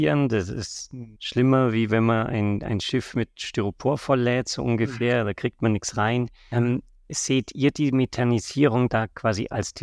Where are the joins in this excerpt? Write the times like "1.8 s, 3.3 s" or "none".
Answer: 1.1 s

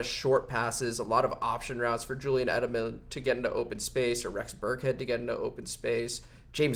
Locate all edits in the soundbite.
none

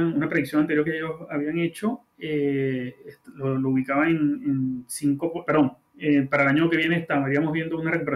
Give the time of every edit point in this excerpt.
5.4 s

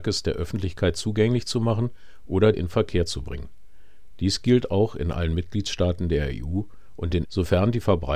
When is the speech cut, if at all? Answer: 2.5 s, 7.2 s

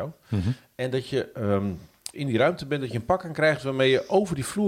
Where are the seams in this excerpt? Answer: 2.1 s

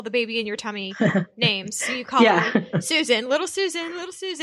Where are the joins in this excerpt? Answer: none

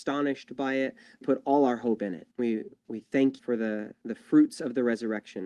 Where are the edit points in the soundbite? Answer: 1.2 s, 2.3 s, 3.4 s

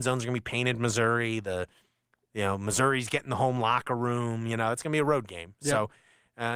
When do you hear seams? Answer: none

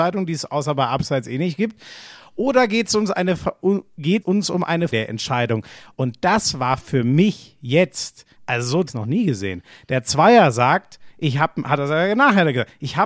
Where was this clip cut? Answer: 4.2 s, 4.9 s, 8.4 s, 8.9 s

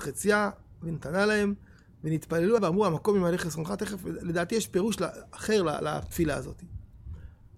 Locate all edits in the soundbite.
2.6 s

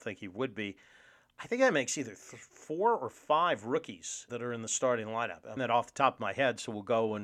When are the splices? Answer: 4.3 s, 5.6 s

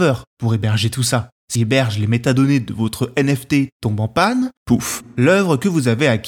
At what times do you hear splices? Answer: 1.6 s

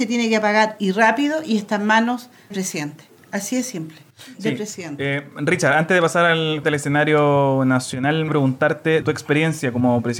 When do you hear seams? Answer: 2.5 s, 6.6 s, 8.3 s, 9.0 s

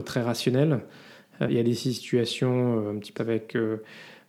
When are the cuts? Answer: 1.5 s, 3.2 s

